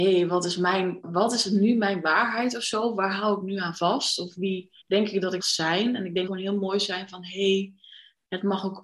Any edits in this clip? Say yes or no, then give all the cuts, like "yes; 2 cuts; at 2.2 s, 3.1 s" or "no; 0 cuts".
yes; 4 cuts; at 1.0 s, 4.8 s, 5.4 s, 6.3 s